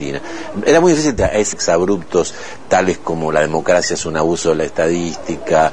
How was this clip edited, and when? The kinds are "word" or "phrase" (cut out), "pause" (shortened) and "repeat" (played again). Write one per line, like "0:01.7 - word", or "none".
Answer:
0:01.2 - word
0:01.5 - phrase